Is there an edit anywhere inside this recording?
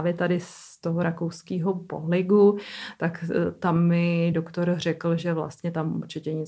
no; 0 cuts

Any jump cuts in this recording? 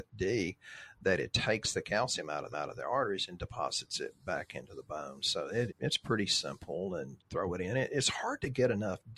yes; 3 cuts; at 2.5 s, 5.7 s, 7.2 s

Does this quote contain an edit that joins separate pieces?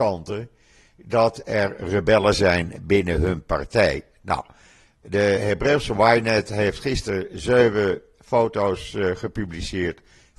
no; 0 cuts

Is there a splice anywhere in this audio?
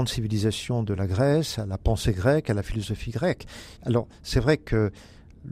yes; 1 cut; at 3.8 s

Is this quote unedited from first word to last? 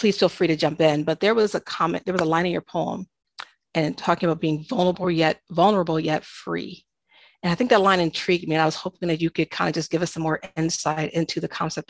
yes; 0 cuts

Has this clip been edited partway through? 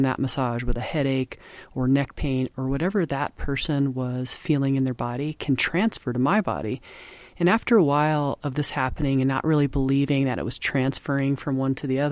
no; 0 cuts

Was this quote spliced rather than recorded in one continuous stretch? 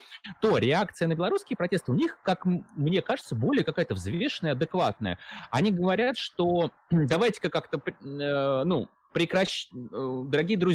no; 0 cuts

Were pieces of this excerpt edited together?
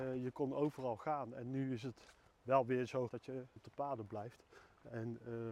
yes; 3 cuts; at 2.3 s, 3.1 s, 3.6 s

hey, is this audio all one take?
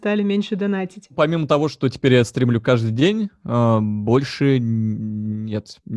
yes; 0 cuts

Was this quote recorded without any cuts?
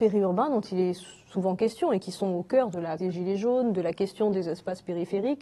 no; 1 cut; at 3.0 s

